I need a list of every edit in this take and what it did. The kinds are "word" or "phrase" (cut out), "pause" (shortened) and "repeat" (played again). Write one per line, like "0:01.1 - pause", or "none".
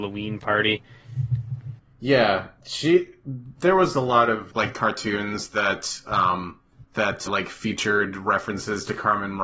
0:04.5 - word
0:07.3 - word